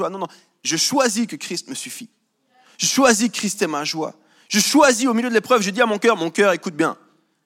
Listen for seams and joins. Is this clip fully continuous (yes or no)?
yes